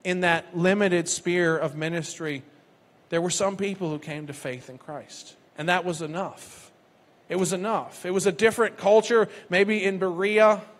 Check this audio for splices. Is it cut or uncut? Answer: cut